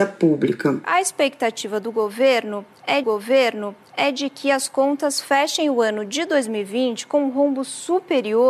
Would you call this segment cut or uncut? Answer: cut